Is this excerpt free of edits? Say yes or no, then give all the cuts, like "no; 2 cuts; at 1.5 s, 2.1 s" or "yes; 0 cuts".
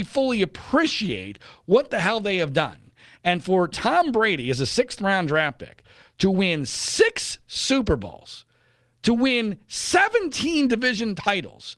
yes; 0 cuts